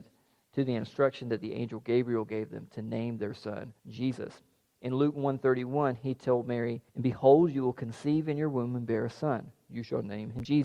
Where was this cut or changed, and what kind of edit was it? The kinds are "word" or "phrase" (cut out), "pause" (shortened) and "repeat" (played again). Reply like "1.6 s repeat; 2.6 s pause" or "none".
3.8 s pause; 6.9 s pause